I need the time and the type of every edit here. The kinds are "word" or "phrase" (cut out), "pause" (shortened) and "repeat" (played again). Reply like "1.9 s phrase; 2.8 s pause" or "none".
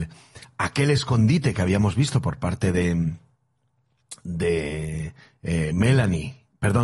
none